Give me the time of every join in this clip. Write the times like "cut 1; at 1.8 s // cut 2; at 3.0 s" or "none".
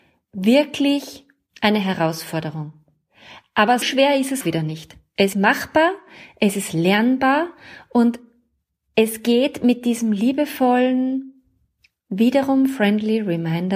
cut 1; at 3.8 s // cut 2; at 4.4 s // cut 3; at 5.3 s